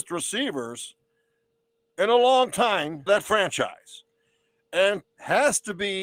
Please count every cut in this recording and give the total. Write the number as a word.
two